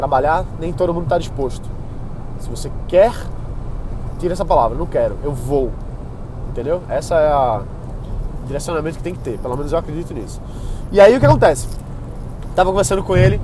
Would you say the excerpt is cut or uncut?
uncut